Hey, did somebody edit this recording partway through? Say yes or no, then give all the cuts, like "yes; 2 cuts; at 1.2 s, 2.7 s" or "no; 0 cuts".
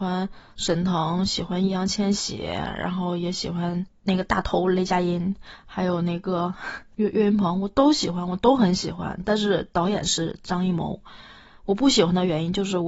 no; 0 cuts